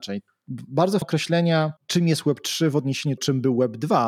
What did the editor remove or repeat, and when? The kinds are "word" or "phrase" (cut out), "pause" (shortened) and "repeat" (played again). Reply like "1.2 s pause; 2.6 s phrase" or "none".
1.0 s word; 1.8 s pause; 3.2 s word